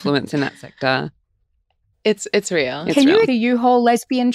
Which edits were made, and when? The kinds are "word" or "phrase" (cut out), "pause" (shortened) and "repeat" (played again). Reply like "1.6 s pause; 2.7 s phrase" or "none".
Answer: 1.2 s pause; 3.2 s word